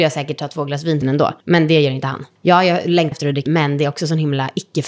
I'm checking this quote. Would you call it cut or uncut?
cut